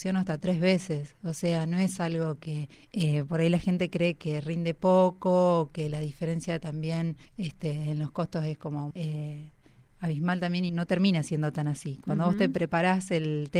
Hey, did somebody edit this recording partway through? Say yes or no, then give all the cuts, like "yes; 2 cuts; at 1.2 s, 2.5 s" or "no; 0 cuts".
yes; 4 cuts; at 2.7 s, 7.2 s, 8.9 s, 10.7 s